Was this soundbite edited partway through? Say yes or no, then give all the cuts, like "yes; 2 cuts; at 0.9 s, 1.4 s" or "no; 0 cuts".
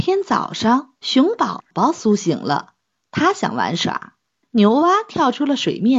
no; 0 cuts